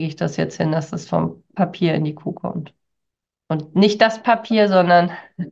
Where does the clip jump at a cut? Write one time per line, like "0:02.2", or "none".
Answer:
none